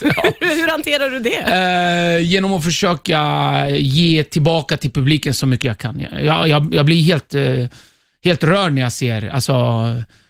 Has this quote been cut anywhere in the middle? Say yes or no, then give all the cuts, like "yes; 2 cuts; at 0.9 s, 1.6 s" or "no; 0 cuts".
no; 0 cuts